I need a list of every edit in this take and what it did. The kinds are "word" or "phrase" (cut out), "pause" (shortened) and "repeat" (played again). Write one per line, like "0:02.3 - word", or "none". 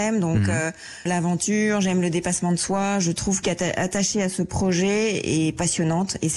0:01.1 - word
0:03.4 - phrase